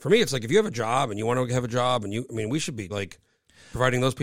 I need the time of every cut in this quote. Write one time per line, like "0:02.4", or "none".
0:02.9